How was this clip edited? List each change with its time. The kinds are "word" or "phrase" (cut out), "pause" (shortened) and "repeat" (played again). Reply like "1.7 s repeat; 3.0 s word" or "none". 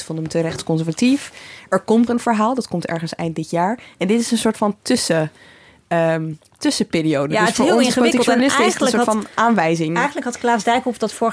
2.1 s word